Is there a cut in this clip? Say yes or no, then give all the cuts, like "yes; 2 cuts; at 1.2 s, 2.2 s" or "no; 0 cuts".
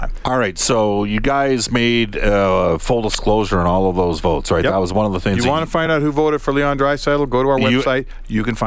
no; 0 cuts